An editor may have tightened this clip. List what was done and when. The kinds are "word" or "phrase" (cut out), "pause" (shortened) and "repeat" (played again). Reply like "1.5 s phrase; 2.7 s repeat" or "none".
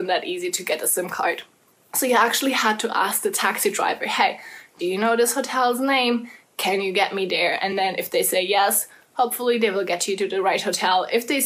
none